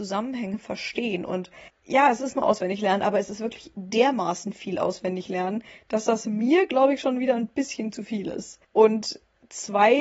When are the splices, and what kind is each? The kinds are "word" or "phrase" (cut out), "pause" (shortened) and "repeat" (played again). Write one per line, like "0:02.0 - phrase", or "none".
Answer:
0:08.6 - pause